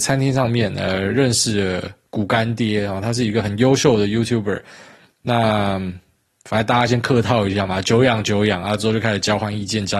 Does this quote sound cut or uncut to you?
uncut